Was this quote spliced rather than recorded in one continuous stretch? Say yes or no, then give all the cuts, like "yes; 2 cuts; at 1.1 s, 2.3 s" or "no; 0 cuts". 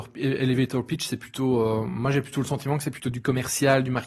no; 0 cuts